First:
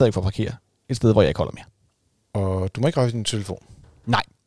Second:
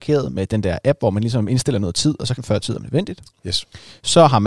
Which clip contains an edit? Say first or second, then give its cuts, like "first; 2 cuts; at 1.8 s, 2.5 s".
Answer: second; 1 cut; at 2.4 s